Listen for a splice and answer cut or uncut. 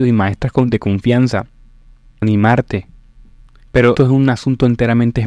cut